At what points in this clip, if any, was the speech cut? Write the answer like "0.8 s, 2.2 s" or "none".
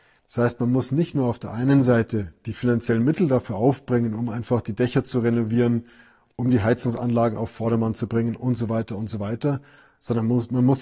none